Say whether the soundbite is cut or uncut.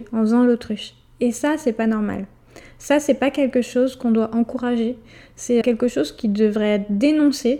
cut